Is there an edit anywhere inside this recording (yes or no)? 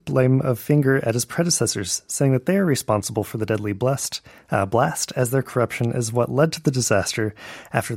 no